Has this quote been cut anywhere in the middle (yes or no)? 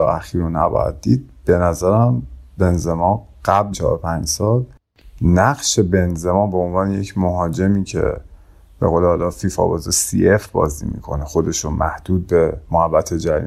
yes